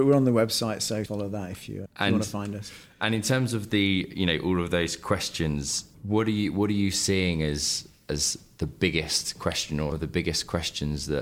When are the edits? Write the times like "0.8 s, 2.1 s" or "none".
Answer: 1.1 s, 1.9 s, 5.9 s, 9.9 s